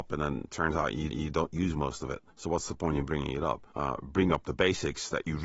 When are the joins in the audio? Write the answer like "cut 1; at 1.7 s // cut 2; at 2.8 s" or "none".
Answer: cut 1; at 1.1 s // cut 2; at 2.3 s // cut 3; at 3.7 s

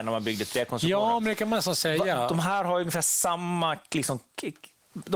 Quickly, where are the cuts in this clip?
none

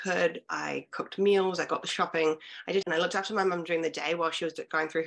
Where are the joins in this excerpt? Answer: cut 1; at 2.8 s

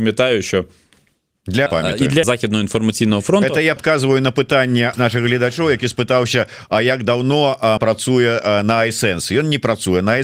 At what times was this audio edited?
cut 1; at 1.7 s // cut 2; at 2.2 s // cut 3; at 3.8 s // cut 4; at 4.9 s // cut 5; at 7.8 s

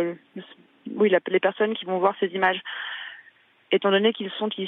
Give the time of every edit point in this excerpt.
none

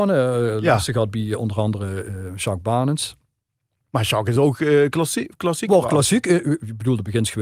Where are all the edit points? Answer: none

